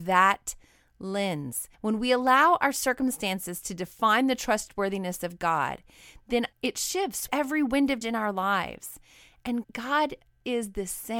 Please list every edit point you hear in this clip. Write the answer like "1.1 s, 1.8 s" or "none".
1.7 s, 6.5 s, 7.3 s, 8.0 s, 9.6 s